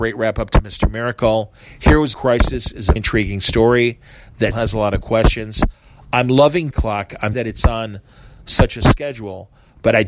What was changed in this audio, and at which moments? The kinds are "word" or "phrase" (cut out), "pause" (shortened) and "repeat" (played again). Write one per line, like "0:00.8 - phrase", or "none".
0:02.1 - word
0:03.0 - word
0:04.5 - word
0:06.7 - word
0:07.3 - word
0:08.8 - word